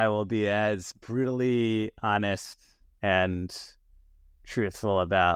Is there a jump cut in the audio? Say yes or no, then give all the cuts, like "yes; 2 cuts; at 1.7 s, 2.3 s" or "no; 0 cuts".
no; 0 cuts